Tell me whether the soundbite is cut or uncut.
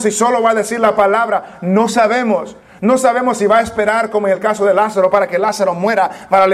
uncut